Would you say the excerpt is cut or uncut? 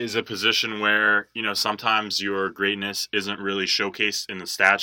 uncut